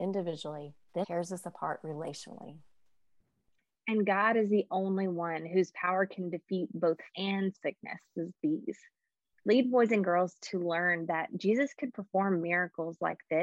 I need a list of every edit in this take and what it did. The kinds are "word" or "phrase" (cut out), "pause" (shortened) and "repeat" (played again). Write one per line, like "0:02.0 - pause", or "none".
0:01.0 - word
0:07.1 - word
0:07.5 - word
0:08.3 - word